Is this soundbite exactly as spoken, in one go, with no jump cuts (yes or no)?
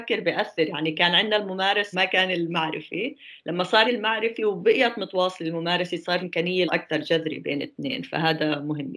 no